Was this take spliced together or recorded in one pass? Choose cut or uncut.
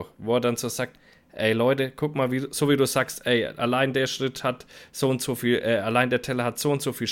uncut